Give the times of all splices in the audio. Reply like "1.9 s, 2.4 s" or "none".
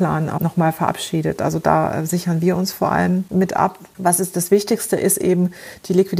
none